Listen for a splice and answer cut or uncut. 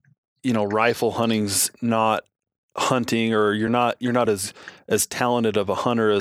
uncut